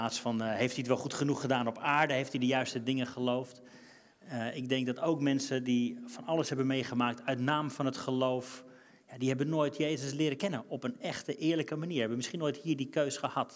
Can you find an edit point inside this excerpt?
no; 0 cuts

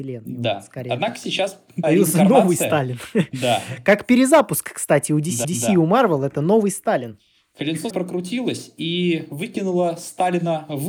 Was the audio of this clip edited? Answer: yes; 3 cuts; at 1.8 s, 5.4 s, 7.9 s

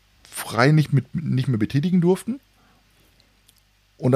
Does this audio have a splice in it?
no; 0 cuts

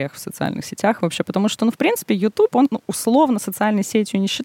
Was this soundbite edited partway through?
yes; 1 cut; at 2.7 s

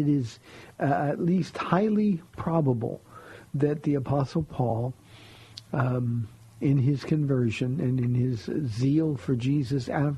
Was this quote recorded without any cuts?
yes; 0 cuts

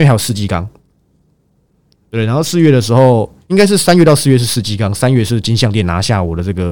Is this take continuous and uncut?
yes; 0 cuts

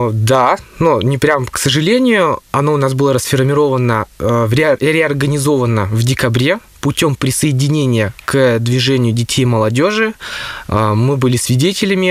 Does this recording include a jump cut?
no; 0 cuts

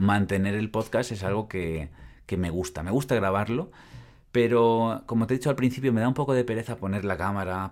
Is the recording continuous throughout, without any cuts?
yes; 0 cuts

